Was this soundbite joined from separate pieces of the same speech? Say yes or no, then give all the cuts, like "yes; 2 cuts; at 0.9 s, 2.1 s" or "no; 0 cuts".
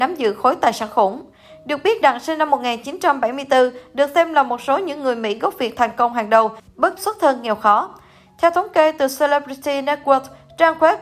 yes; 2 cuts; at 2.0 s, 7.0 s